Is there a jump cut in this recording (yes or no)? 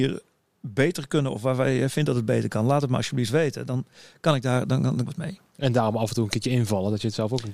yes